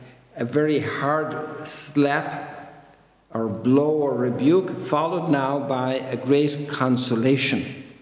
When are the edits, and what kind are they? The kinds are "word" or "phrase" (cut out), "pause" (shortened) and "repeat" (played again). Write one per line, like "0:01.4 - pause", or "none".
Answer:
none